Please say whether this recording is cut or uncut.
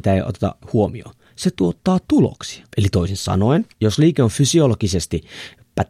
cut